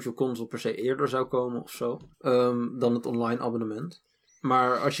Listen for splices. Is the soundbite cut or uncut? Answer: cut